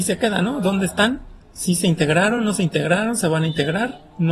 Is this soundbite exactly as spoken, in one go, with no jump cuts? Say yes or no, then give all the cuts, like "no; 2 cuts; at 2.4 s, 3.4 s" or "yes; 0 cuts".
yes; 0 cuts